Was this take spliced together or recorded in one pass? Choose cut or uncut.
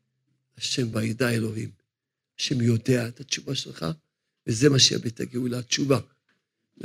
uncut